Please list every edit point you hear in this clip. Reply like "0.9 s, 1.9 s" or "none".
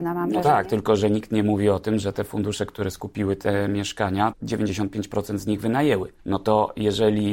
4.3 s, 6.2 s